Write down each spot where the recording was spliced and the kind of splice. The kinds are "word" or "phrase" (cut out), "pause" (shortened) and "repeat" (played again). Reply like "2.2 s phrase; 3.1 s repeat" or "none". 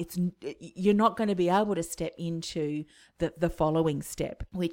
none